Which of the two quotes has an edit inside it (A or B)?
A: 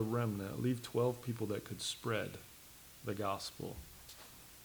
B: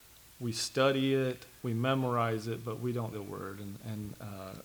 B